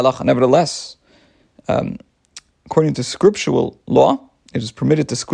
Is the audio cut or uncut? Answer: uncut